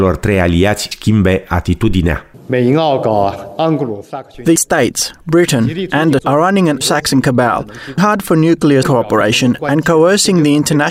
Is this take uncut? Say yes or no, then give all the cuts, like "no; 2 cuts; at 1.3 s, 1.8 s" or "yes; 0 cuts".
no; 6 cuts; at 0.9 s, 4.6 s, 6.2 s, 6.8 s, 8.0 s, 8.8 s